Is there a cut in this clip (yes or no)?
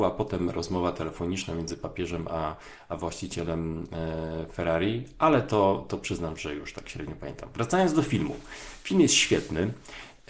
no